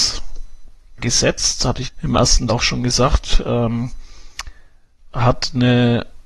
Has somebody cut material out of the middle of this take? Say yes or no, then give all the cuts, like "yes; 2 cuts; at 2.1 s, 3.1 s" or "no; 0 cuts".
yes; 4 cuts; at 1.0 s, 1.8 s, 2.5 s, 5.1 s